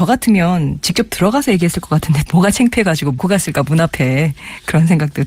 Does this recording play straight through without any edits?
no; 2 cuts; at 2.3 s, 3.2 s

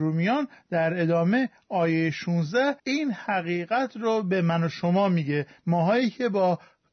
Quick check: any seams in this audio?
yes; 1 cut; at 2.8 s

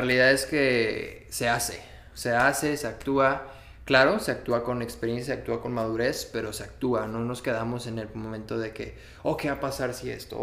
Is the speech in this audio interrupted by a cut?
no; 0 cuts

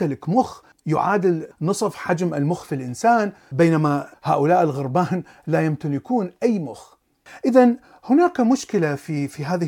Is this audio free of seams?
yes; 0 cuts

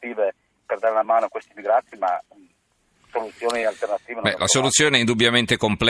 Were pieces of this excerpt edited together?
no; 0 cuts

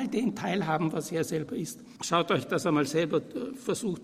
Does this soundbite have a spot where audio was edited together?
yes; 1 cut; at 2.0 s

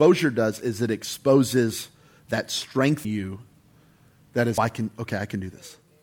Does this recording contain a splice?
yes; 2 cuts; at 3.0 s, 4.6 s

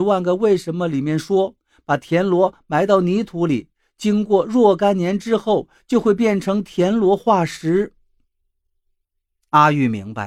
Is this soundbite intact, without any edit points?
yes; 0 cuts

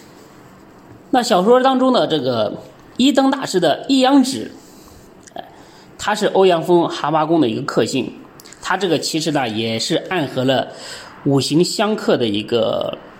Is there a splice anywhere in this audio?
no; 0 cuts

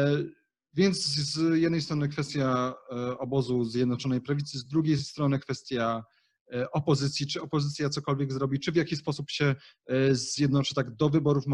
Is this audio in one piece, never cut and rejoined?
yes; 0 cuts

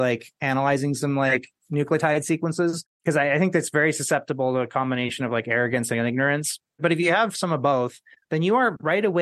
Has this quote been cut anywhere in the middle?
no; 0 cuts

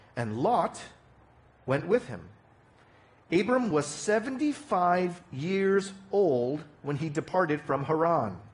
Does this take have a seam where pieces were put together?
no; 0 cuts

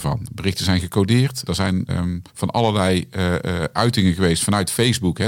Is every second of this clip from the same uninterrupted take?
no; 3 cuts; at 1.5 s, 1.9 s, 2.3 s

